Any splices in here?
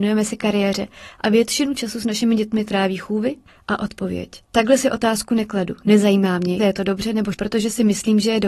yes; 4 cuts; at 3.5 s, 4.4 s, 6.6 s, 7.3 s

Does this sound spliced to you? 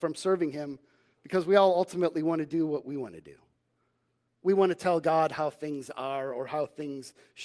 no; 0 cuts

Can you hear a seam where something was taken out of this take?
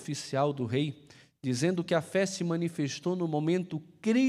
no; 0 cuts

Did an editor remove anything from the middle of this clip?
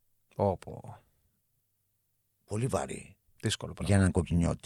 no; 0 cuts

